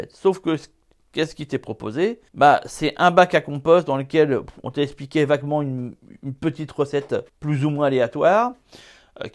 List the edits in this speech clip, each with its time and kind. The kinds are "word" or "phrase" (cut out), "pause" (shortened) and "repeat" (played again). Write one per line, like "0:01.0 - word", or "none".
0:02.3 - pause
0:07.3 - pause